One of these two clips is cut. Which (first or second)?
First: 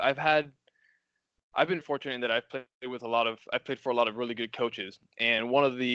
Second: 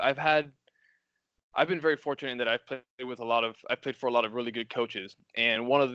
first